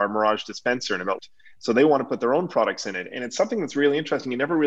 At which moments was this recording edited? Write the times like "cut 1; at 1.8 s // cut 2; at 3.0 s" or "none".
cut 1; at 1.2 s

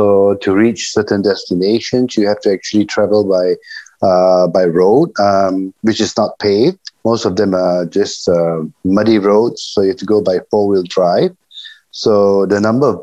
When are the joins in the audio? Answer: cut 1; at 7.0 s

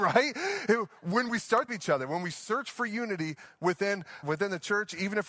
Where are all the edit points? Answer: cut 1; at 1.7 s // cut 2; at 4.2 s

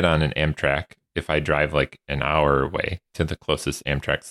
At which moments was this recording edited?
none

